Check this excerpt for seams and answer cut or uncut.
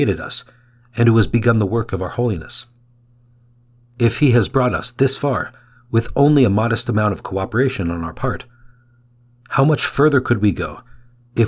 uncut